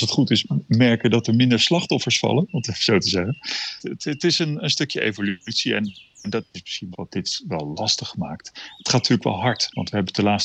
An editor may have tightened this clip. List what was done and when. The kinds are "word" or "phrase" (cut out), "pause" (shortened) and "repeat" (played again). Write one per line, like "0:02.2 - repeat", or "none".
0:06.9 - word

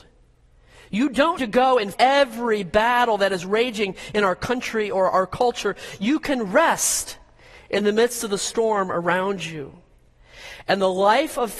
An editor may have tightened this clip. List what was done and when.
0:01.4 - word
0:01.9 - word

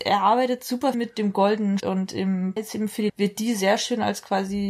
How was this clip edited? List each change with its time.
0:00.9 - word
0:01.8 - word
0:02.6 - word
0:03.1 - word

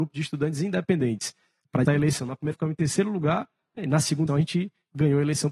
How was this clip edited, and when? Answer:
0:01.9 - word
0:02.5 - word
0:03.8 - word
0:04.3 - word

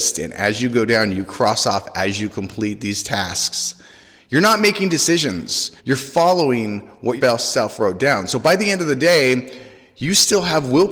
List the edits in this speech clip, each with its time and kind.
0:05.8 - pause
0:07.2 - word

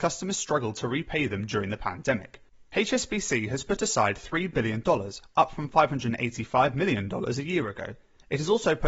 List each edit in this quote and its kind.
0:02.6 - pause

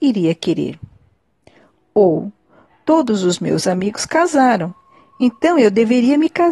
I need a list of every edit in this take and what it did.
none

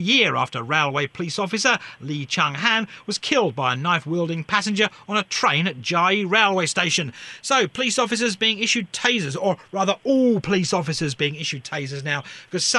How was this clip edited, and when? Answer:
none

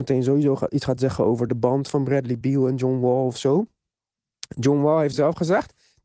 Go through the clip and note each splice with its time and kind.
none

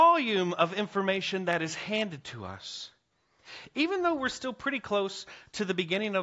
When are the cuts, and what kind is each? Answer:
none

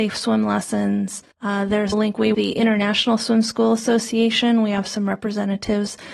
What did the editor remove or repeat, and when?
0:01.3 - pause
0:01.9 - word
0:02.3 - phrase

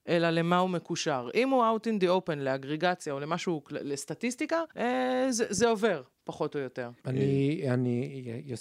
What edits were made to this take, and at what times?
0:04.7 - pause
0:06.1 - pause
0:07.0 - pause

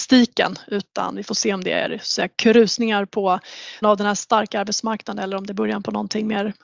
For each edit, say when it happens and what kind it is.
0:03.8 - word

